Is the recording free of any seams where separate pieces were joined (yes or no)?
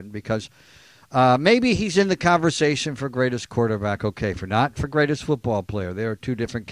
yes